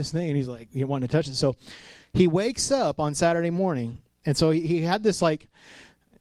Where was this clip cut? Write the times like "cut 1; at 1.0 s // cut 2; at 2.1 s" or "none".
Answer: none